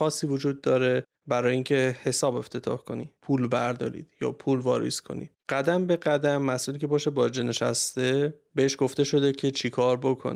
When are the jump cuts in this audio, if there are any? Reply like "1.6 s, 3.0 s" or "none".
1.1 s, 3.2 s, 5.4 s

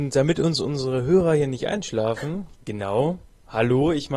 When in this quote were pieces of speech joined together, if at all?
2.5 s

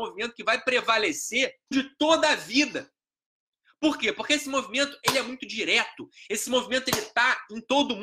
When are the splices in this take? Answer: 1.7 s

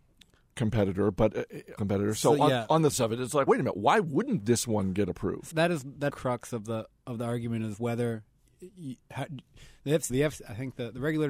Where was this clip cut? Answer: 1.8 s, 2.9 s, 3.5 s, 5.5 s, 6.1 s, 10.1 s

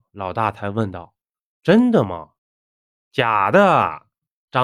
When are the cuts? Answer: 2.4 s

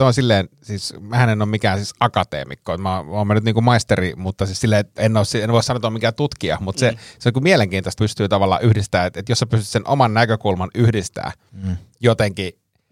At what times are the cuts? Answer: 5.0 s, 8.0 s

